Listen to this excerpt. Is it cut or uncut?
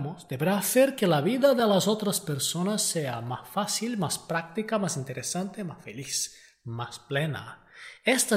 uncut